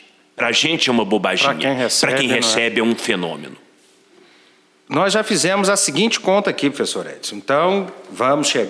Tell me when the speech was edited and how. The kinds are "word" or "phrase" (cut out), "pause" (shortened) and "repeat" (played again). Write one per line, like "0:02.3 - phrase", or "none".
none

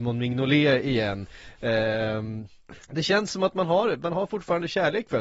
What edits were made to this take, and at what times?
0:02.8 - pause

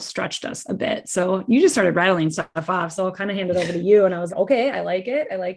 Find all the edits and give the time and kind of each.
0:04.3 - word

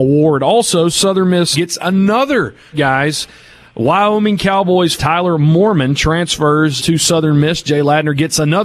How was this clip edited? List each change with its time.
0:01.5 - word
0:02.7 - word
0:05.0 - word
0:06.8 - word

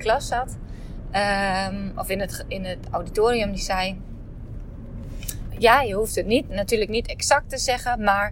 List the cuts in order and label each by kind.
0:05.5 - word

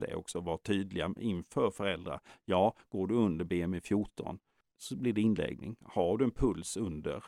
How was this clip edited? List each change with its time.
none

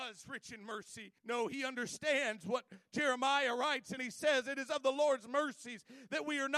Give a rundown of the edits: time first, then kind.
0:01.2 - pause
0:04.0 - phrase

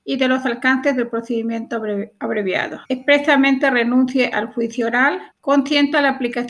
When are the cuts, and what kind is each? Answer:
0:02.9 - pause
0:05.3 - pause

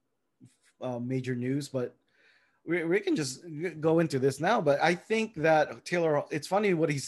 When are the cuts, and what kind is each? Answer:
none

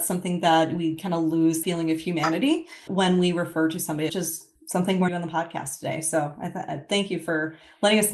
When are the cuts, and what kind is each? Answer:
0:01.6 - word
0:02.9 - word
0:04.1 - phrase
0:04.6 - pause
0:05.1 - phrase

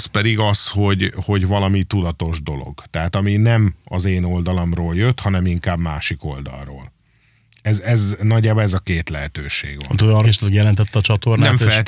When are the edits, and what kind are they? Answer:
0:10.2 - phrase

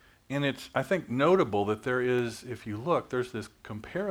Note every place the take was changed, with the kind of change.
none

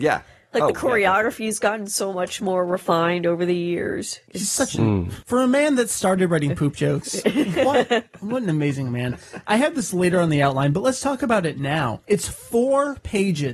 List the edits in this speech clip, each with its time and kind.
none

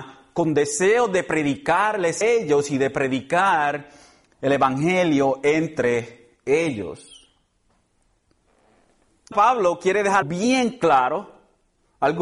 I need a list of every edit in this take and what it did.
0:02.2 - word
0:09.3 - word
0:10.2 - word

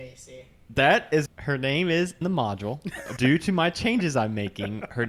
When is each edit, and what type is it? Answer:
0:01.3 - word
0:02.2 - word
0:03.2 - word

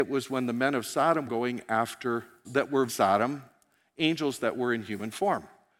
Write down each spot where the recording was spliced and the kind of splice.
0:01.3 - word
0:02.4 - word
0:02.9 - word

